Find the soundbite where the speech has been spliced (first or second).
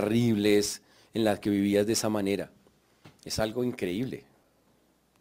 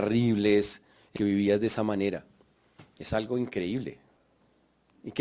second